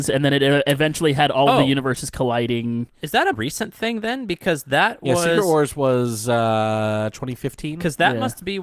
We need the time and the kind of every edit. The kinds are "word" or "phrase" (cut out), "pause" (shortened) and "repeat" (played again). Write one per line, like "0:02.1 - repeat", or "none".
0:03.3 - word

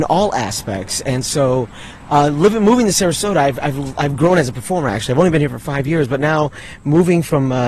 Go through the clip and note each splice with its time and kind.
none

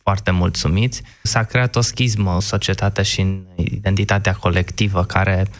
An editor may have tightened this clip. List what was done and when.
0:01.3 - word
0:02.4 - word

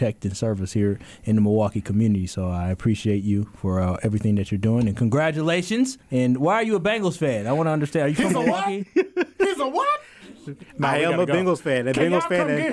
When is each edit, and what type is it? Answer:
0:06.0 - pause

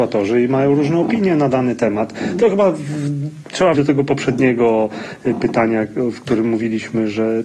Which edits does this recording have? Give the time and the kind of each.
0:03.7 - word

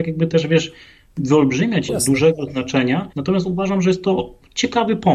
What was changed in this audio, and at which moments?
0:01.9 - word
0:03.1 - pause

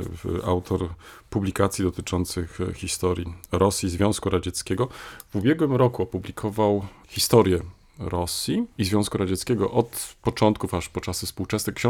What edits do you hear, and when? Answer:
0:07.0 - word
0:08.7 - pause

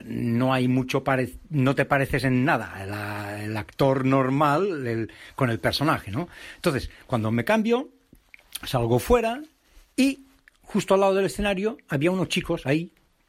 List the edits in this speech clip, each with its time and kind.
none

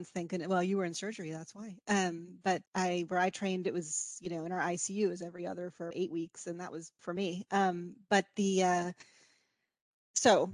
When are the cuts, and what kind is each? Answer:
0:02.7 - word
0:05.9 - word
0:07.0 - word

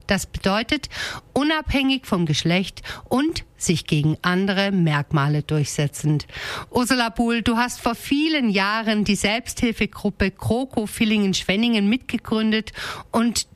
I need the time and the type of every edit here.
none

